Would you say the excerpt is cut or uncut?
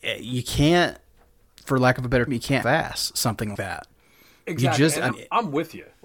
cut